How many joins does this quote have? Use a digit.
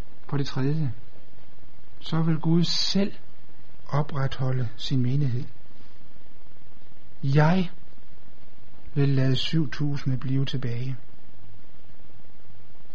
0